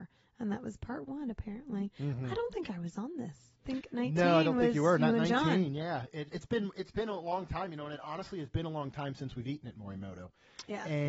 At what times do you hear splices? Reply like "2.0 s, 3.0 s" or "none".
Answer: 6.3 s